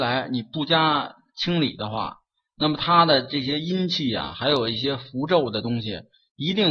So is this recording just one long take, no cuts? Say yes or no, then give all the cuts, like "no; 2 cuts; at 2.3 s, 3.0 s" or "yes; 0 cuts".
yes; 0 cuts